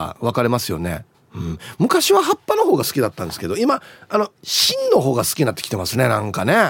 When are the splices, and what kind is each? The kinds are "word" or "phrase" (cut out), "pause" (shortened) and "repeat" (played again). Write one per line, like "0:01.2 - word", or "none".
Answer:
0:01.1 - pause

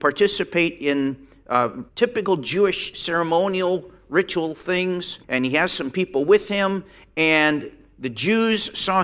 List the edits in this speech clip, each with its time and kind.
0:01.9 - pause
0:05.2 - pause

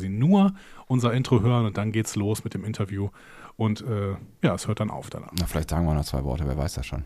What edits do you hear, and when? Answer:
none

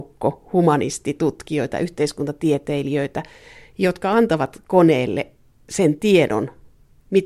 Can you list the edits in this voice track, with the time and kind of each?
none

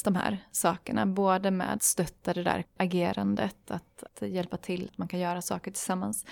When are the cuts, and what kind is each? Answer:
0:01.8 - word
0:02.6 - word
0:04.1 - word
0:04.9 - word

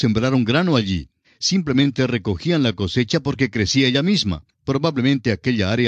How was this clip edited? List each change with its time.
0:01.2 - pause
0:04.5 - pause

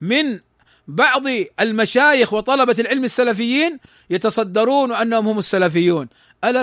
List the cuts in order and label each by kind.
none

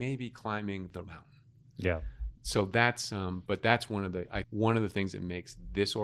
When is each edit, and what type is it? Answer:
0:01.0 - word
0:03.5 - word
0:04.4 - word

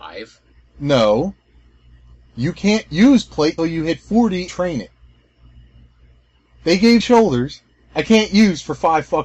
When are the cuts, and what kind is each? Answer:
0:03.6 - word
0:04.5 - word
0:07.0 - word

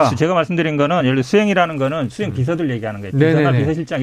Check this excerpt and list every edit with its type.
none

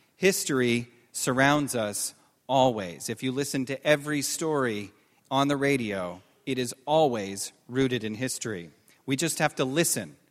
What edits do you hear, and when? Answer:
none

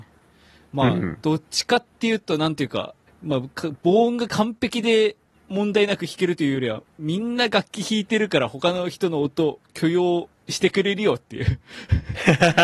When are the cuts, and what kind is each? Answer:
0:03.1 - pause
0:05.3 - pause
0:06.9 - pause
0:10.4 - pause

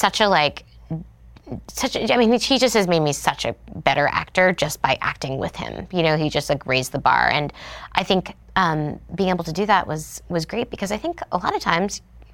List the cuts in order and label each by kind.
0:08.4 - pause

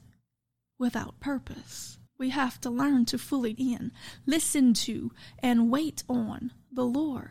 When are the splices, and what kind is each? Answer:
0:02.1 - pause
0:03.6 - word

